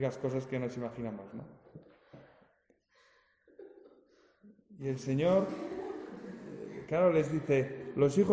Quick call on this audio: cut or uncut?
uncut